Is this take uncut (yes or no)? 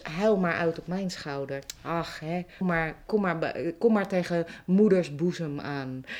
no